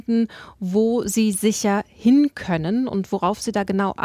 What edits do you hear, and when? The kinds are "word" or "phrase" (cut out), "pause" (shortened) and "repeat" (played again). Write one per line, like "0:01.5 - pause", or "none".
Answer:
none